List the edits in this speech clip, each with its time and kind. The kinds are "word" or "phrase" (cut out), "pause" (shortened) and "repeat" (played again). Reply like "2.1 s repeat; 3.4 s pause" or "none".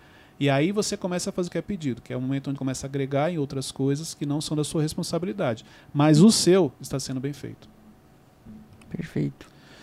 1.5 s word; 2.6 s word